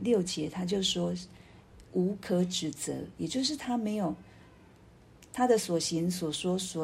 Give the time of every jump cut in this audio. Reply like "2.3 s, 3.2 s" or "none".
none